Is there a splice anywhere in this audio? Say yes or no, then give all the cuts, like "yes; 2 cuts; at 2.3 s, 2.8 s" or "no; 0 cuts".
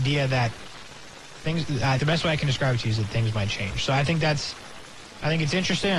yes; 1 cut; at 2.0 s